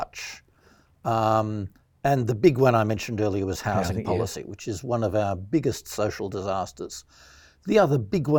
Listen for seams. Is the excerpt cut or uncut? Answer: uncut